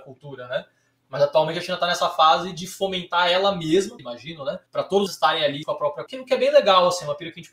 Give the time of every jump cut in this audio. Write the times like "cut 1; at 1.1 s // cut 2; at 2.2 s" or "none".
cut 1; at 4.0 s // cut 2; at 4.7 s // cut 3; at 5.1 s // cut 4; at 5.6 s // cut 5; at 6.1 s